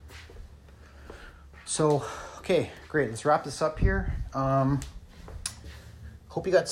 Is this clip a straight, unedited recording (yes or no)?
yes